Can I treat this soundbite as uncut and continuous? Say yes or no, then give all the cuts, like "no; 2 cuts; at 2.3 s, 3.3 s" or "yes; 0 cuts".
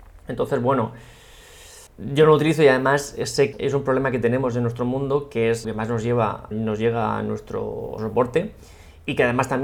no; 5 cuts; at 1.9 s, 3.5 s, 5.6 s, 6.5 s, 8.0 s